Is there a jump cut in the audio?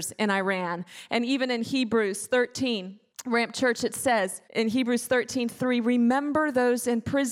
yes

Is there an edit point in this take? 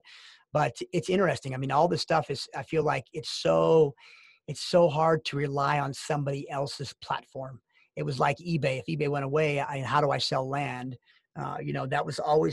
no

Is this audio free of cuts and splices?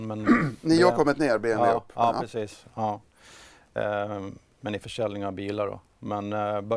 yes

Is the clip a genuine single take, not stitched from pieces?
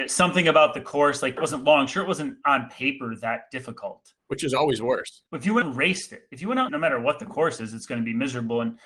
no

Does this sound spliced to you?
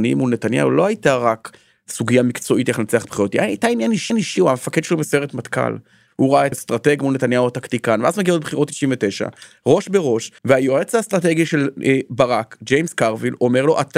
yes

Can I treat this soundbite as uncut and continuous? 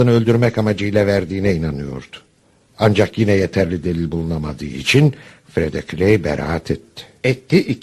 yes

